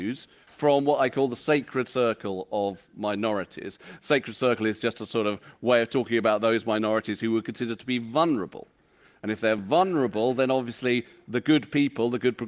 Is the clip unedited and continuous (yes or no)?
yes